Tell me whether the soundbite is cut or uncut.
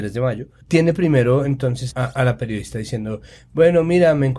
uncut